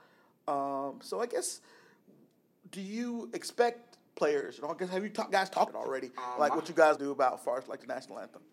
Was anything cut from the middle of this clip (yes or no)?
yes